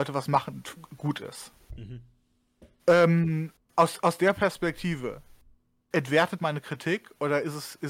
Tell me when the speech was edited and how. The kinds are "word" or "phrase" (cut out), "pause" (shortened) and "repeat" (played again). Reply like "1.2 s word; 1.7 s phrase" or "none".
3.6 s word; 5.9 s word; 6.4 s word